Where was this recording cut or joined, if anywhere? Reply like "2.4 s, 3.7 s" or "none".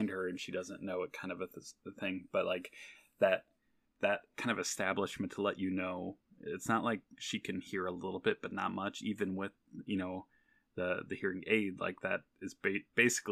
none